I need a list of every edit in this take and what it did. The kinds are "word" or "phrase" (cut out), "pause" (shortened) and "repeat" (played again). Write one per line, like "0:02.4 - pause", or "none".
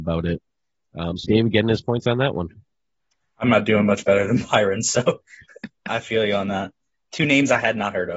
0:01.2 - phrase
0:05.9 - word